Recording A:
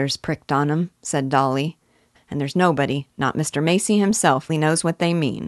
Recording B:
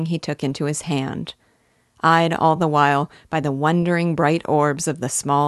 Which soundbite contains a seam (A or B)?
A